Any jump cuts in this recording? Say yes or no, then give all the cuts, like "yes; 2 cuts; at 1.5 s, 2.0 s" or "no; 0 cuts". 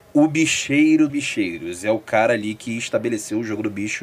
yes; 1 cut; at 1.1 s